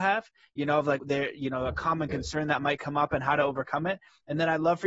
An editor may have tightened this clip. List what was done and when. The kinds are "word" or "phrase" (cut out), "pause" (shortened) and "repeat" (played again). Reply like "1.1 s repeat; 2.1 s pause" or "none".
1.0 s word